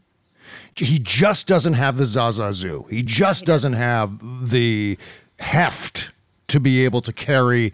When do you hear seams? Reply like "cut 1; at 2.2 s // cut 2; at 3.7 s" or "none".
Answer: none